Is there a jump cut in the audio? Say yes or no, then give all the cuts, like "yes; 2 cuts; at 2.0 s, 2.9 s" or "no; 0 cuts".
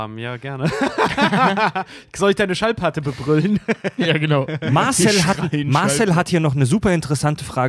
no; 0 cuts